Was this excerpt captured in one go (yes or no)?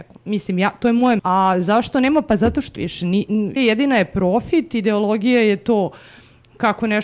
no